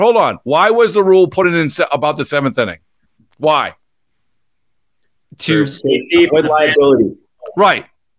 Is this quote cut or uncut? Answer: uncut